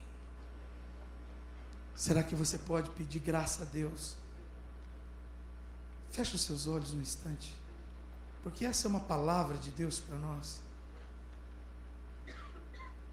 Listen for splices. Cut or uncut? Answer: uncut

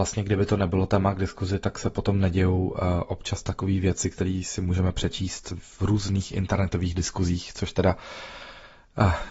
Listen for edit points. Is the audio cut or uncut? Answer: uncut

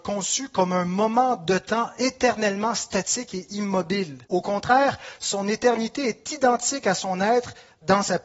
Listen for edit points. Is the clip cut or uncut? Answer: cut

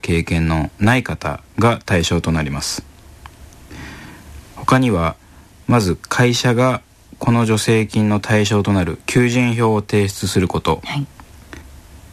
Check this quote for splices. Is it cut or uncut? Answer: uncut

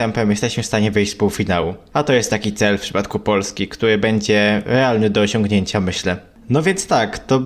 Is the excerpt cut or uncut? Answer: uncut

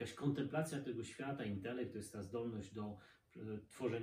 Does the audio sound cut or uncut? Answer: uncut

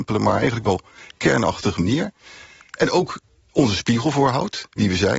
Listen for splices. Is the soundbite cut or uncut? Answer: uncut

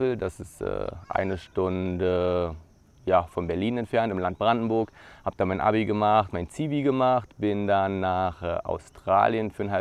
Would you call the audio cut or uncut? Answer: uncut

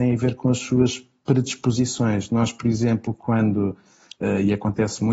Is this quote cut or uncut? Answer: uncut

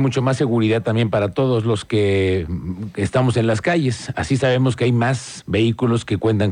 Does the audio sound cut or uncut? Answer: uncut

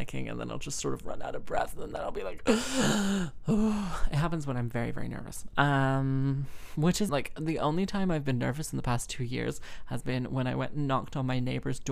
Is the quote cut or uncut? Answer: cut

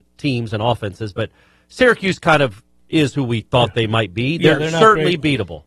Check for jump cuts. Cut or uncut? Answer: uncut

